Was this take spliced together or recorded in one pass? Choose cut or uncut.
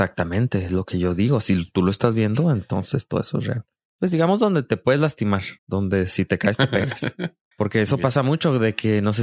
cut